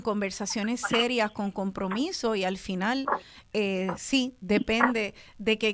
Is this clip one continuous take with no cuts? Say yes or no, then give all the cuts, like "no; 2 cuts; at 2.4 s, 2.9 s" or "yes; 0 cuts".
yes; 0 cuts